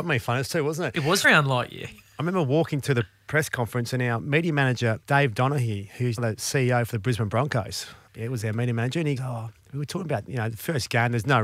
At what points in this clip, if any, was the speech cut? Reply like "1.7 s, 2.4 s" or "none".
1.2 s, 5.0 s, 6.2 s, 8.1 s, 9.2 s